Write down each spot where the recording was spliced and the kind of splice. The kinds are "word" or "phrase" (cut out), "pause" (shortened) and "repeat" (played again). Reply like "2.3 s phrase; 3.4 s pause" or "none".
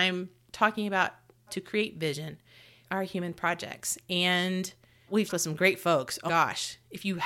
1.5 s word; 2.8 s word; 5.3 s word; 6.3 s word